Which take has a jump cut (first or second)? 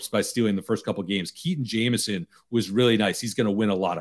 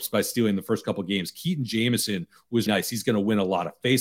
second